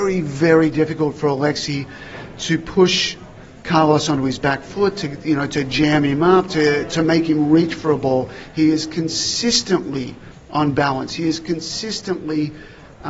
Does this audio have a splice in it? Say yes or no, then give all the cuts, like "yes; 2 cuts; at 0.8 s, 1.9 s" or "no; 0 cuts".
no; 0 cuts